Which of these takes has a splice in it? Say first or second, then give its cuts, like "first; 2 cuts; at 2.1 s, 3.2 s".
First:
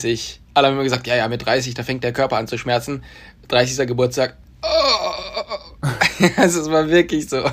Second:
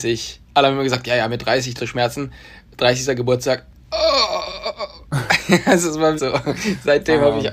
second; 2 cuts; at 1.8 s, 6.2 s